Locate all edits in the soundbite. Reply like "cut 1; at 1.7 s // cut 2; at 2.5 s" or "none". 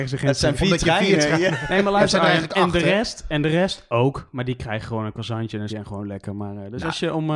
cut 1; at 5.7 s